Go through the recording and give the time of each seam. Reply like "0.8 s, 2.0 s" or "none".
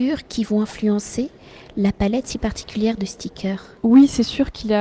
none